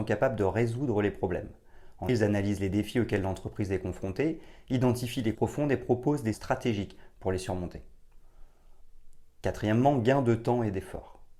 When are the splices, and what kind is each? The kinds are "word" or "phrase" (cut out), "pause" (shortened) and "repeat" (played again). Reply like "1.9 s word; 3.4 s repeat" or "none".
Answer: 2.1 s word; 5.3 s word; 6.3 s word